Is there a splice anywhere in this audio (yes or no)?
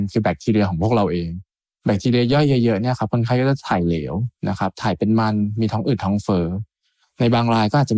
no